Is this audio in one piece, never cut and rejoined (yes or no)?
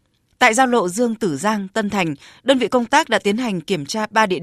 yes